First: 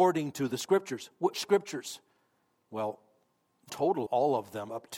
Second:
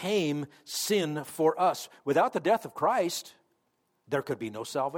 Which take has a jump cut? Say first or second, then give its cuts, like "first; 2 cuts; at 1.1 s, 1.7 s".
first; 3 cuts; at 1.3 s, 3.7 s, 4.1 s